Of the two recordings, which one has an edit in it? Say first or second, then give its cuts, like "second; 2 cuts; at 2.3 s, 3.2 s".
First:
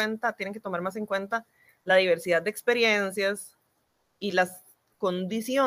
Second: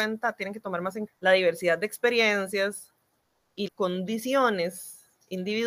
second; 2 cuts; at 1.1 s, 3.7 s